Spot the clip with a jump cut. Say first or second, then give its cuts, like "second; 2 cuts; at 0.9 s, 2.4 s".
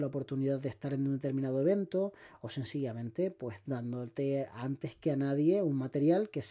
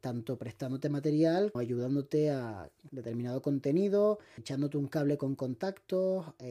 second; 3 cuts; at 1.5 s, 2.9 s, 4.4 s